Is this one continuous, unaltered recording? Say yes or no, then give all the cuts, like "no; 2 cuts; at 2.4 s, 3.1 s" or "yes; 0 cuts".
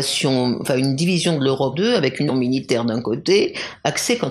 no; 2 cuts; at 1.7 s, 2.3 s